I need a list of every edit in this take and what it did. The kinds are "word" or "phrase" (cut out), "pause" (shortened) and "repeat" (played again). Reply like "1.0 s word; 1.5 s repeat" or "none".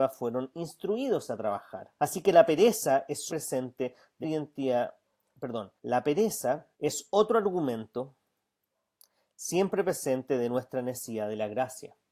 2.0 s pause; 3.3 s phrase; 4.2 s word; 5.8 s pause; 6.7 s pause